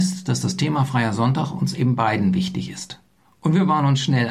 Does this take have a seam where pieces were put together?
no; 0 cuts

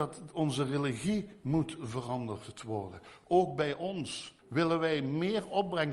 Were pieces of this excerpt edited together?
yes; 1 cut; at 4.4 s

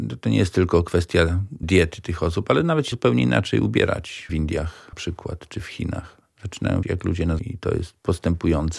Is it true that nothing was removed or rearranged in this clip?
no; 6 cuts; at 1.6 s, 2.9 s, 4.3 s, 4.9 s, 6.8 s, 7.4 s

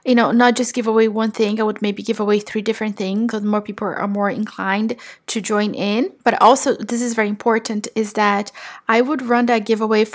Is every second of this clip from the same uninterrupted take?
no; 1 cut; at 3.3 s

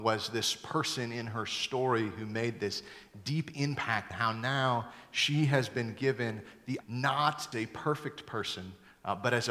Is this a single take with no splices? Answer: no; 3 cuts; at 4.1 s, 6.8 s, 7.5 s

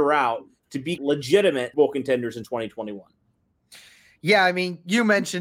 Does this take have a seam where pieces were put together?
yes; 2 cuts; at 1.0 s, 1.7 s

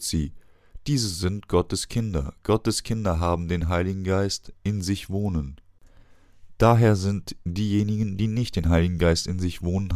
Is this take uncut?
yes; 0 cuts

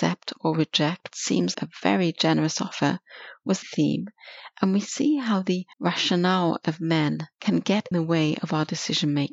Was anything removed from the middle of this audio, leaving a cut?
yes; 6 cuts; at 1.1 s, 1.5 s, 3.6 s, 5.7 s, 7.3 s, 7.9 s

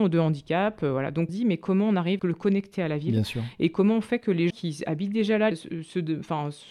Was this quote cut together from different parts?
yes; 4 cuts; at 1.3 s, 2.2 s, 4.5 s, 5.5 s

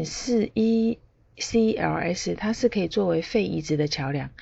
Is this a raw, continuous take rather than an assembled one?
yes; 0 cuts

